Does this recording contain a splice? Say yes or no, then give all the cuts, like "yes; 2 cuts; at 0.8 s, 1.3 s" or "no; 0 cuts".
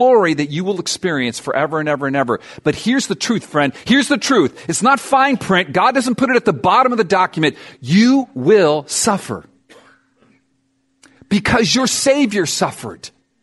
no; 0 cuts